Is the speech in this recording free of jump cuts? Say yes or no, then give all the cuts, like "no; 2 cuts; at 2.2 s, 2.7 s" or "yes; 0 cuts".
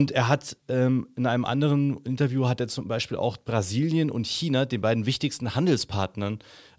yes; 0 cuts